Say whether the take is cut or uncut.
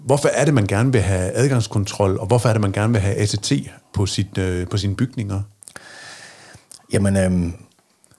uncut